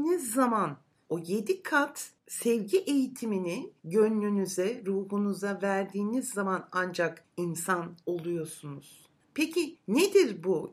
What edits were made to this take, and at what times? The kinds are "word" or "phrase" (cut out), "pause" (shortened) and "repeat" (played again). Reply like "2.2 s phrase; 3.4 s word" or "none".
3.8 s pause